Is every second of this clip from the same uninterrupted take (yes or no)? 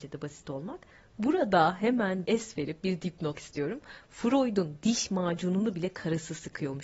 no